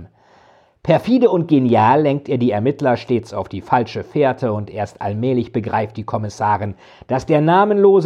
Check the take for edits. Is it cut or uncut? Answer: uncut